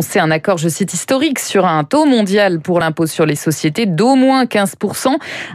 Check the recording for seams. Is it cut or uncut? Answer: uncut